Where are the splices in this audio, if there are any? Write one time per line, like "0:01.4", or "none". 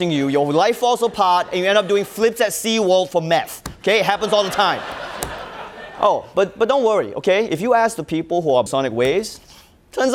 0:08.7